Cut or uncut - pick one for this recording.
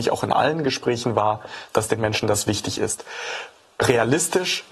uncut